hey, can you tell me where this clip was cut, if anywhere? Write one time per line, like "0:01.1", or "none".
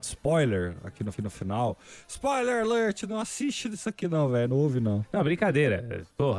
0:01.1